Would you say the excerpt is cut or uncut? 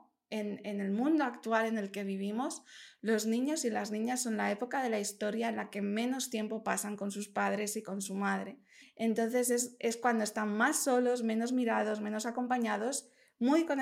cut